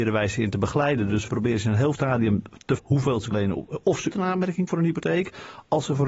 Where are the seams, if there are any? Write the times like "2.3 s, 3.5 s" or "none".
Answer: 1.3 s, 1.9 s, 2.8 s, 3.3 s, 4.1 s, 4.7 s